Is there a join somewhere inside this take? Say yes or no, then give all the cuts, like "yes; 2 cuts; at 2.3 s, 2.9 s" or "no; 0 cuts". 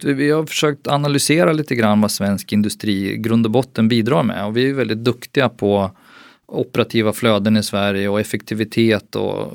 no; 0 cuts